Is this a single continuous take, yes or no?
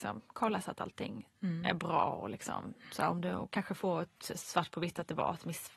yes